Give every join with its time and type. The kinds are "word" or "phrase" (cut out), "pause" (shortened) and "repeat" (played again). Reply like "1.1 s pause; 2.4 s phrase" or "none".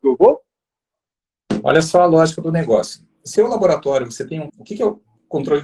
3.4 s word; 4.5 s phrase